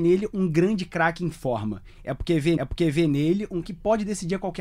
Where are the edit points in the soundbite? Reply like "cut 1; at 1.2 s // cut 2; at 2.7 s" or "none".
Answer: cut 1; at 2.6 s // cut 2; at 3.6 s